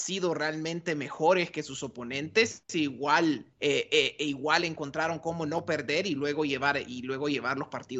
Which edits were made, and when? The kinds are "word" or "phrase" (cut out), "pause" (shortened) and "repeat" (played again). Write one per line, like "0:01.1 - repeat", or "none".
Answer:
0:03.5 - pause